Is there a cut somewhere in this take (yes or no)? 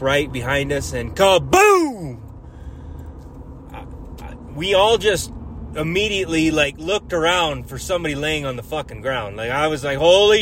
no